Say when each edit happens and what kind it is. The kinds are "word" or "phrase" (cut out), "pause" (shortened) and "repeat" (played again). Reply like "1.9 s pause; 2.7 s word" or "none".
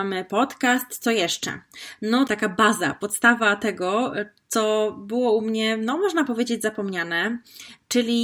2.3 s word